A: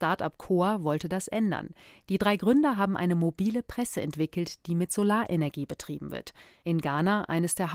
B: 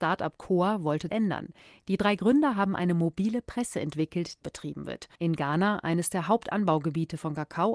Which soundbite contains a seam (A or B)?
B